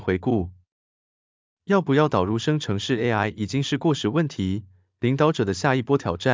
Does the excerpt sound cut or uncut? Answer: uncut